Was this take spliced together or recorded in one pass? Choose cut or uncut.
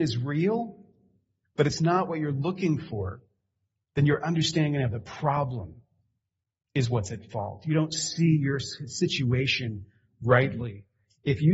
uncut